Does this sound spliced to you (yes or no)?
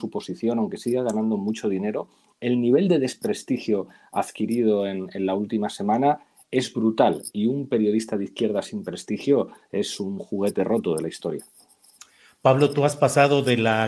no